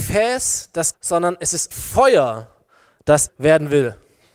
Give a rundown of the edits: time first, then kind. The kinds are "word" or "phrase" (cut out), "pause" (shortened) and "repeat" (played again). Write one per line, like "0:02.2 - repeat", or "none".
0:00.9 - word
0:01.7 - word
0:03.3 - word